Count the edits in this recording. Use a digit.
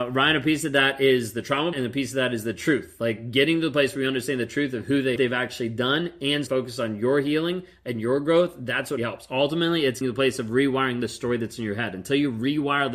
5